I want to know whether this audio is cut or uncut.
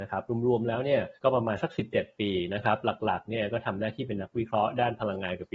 cut